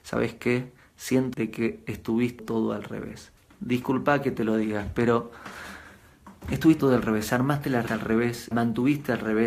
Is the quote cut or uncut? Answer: cut